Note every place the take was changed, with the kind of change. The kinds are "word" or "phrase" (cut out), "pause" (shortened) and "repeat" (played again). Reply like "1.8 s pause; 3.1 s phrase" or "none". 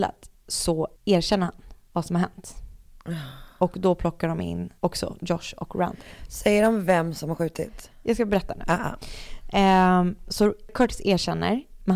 1.0 s pause; 4.8 s pause